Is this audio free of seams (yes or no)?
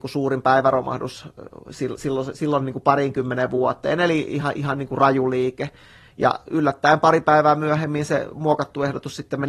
yes